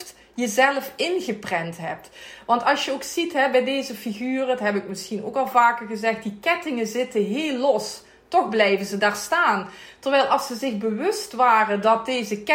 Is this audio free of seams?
yes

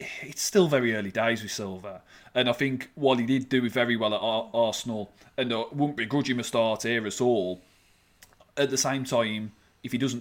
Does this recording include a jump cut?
no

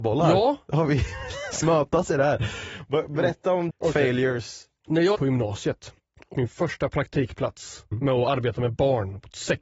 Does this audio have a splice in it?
yes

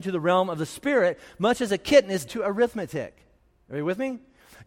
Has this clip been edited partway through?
yes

